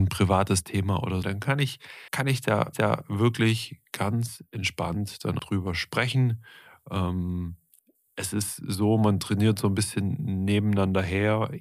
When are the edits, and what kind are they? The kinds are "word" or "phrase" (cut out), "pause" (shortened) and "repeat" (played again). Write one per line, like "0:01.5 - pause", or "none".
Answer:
0:01.2 - phrase
0:02.1 - pause
0:02.7 - repeat
0:05.4 - word